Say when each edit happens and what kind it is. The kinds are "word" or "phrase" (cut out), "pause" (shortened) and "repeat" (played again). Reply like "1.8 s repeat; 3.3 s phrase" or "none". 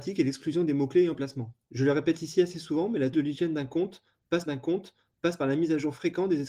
1.6 s pause; 3.1 s word; 4.5 s repeat